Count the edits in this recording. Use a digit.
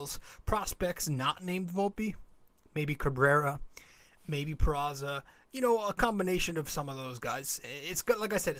0